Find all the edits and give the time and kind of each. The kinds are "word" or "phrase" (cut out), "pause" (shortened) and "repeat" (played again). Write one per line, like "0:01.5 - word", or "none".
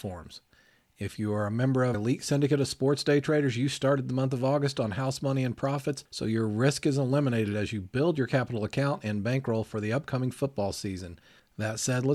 0:01.9 - word